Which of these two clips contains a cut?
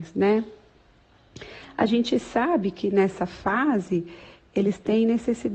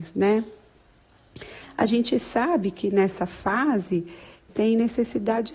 second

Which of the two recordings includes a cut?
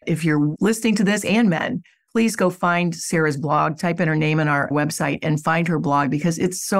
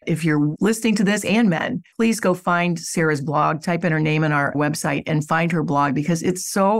second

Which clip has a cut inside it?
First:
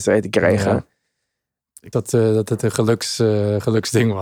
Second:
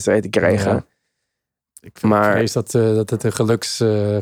first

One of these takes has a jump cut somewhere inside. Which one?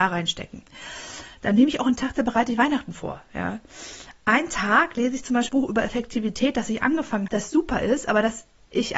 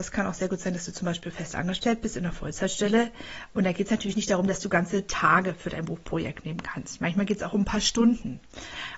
first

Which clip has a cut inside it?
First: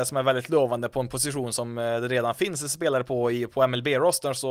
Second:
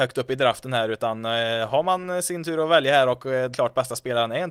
second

